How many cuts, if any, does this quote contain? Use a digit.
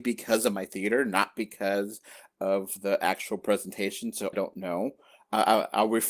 1